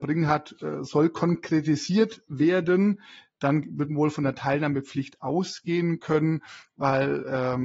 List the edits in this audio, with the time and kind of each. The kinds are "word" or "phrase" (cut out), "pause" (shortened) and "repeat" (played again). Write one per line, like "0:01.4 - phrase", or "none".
none

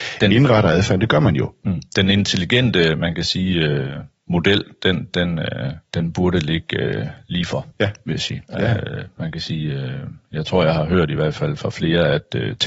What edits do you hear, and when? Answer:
0:05.8 - pause
0:07.7 - pause
0:08.4 - pause

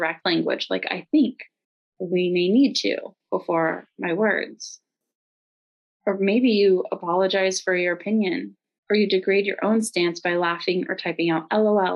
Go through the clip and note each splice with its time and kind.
none

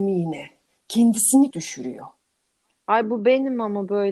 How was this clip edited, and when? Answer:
0:01.5 - word

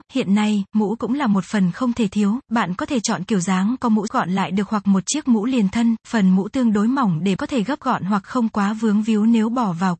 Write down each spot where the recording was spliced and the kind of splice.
0:04.1 - word
0:07.4 - word

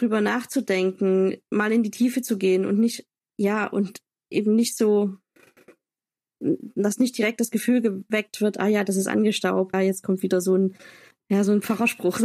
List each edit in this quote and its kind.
0:09.7 - phrase

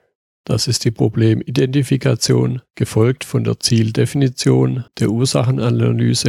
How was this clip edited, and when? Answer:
0:02.7 - pause
0:04.9 - pause

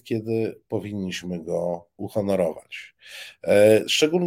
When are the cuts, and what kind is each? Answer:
0:02.0 - word

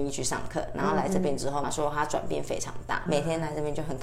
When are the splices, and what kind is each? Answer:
0:01.6 - phrase
0:03.1 - word

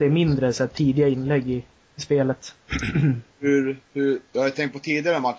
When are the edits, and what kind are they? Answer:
0:01.8 - pause

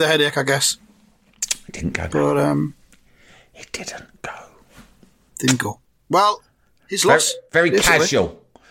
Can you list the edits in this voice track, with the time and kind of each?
none

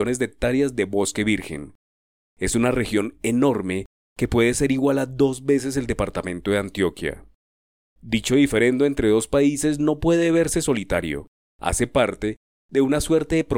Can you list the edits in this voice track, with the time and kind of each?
none

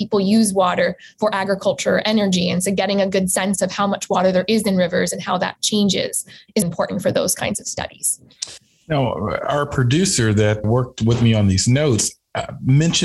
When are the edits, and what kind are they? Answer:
0:06.6 - word
0:10.6 - word

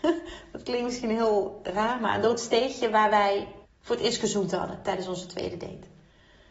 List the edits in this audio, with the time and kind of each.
0:03.6 - pause

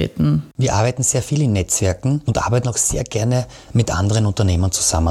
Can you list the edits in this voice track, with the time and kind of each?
none

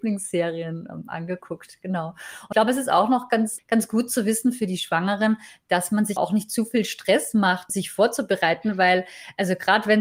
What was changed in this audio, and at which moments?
0:02.5 - word
0:03.6 - word
0:06.2 - word
0:07.7 - word

